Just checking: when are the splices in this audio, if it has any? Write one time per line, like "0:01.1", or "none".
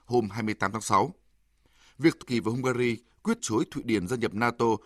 0:02.2
0:03.4